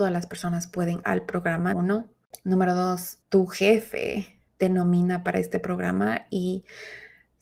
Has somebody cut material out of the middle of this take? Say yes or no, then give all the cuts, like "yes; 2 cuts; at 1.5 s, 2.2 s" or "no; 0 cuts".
yes; 4 cuts; at 1.0 s, 1.7 s, 3.2 s, 4.5 s